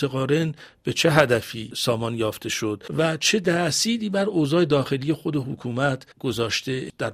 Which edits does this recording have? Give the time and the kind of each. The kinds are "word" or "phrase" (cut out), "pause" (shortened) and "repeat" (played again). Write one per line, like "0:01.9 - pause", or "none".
0:02.9 - pause
0:06.1 - pause